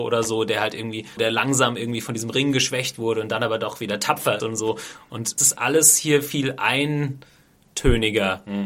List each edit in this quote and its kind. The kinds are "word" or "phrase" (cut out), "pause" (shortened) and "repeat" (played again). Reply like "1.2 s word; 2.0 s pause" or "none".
1.2 s word; 4.4 s word; 5.4 s word